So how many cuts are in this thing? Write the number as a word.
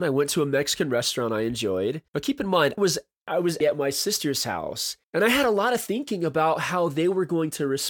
four